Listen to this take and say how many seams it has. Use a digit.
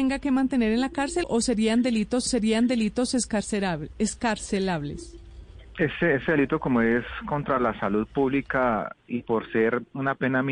3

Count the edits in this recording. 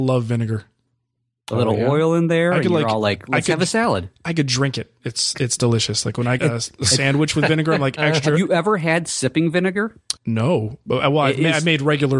2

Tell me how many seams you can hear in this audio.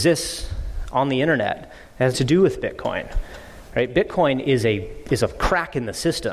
1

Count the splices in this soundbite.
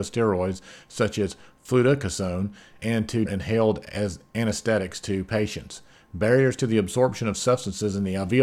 2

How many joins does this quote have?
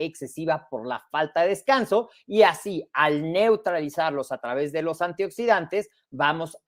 0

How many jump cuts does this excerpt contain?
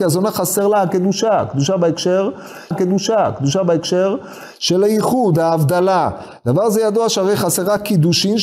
1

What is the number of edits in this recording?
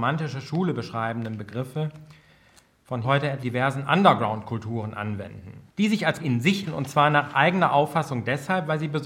5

